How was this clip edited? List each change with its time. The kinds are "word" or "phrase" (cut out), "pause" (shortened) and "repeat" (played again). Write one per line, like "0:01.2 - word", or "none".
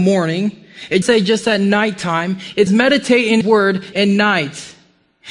0:01.0 - word
0:02.7 - word
0:03.4 - word
0:03.9 - word